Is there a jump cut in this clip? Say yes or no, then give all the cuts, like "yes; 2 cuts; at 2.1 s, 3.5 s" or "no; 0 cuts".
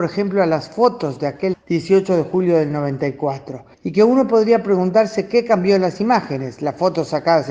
yes; 2 cuts; at 1.5 s, 3.7 s